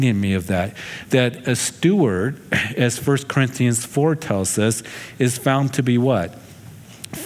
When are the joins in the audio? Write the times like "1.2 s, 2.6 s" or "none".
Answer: none